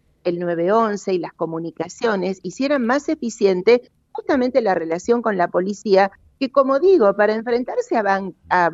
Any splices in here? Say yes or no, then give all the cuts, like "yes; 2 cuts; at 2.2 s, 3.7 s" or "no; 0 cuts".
no; 0 cuts